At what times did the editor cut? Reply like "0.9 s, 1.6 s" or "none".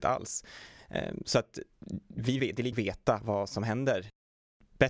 2.4 s, 2.7 s, 3.2 s